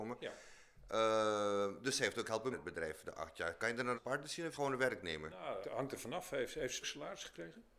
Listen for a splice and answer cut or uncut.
cut